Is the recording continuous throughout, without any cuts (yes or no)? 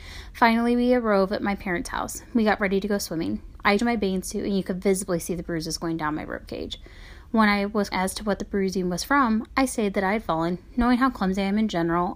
no